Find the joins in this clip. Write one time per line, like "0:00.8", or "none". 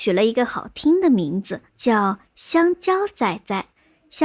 0:01.7